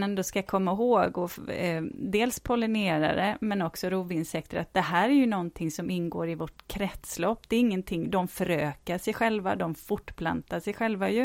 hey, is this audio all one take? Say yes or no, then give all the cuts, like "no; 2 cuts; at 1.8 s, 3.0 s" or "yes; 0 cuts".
yes; 0 cuts